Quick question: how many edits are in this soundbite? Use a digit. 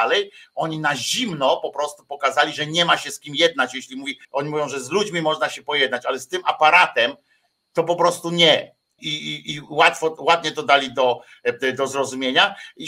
2